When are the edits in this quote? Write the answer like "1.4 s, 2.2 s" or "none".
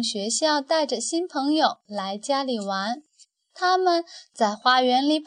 3.2 s